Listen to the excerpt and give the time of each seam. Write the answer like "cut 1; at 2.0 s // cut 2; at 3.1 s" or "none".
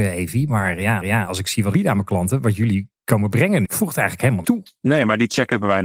cut 1; at 1.0 s // cut 2; at 1.7 s // cut 3; at 3.6 s // cut 4; at 4.4 s

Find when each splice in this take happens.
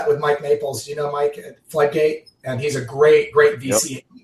none

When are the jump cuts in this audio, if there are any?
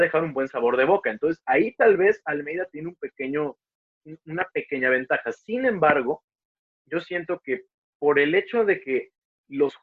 none

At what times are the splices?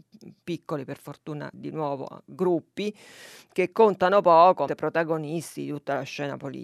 cut 1; at 1.5 s // cut 2; at 4.7 s

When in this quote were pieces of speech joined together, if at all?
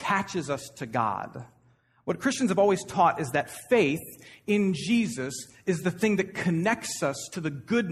none

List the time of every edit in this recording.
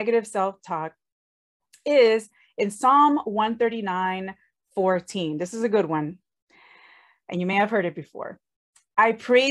none

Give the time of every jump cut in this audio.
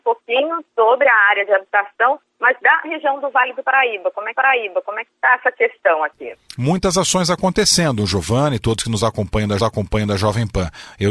cut 1; at 2.8 s // cut 2; at 4.3 s // cut 3; at 9.6 s

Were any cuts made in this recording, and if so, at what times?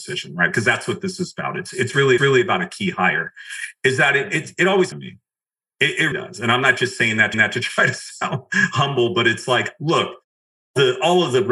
cut 1; at 2.2 s // cut 2; at 4.9 s // cut 3; at 6.1 s // cut 4; at 7.3 s

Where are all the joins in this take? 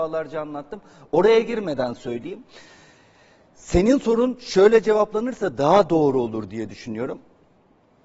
none

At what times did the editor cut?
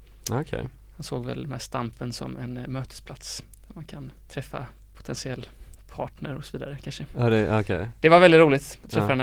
cut 1; at 1.4 s // cut 2; at 4.2 s

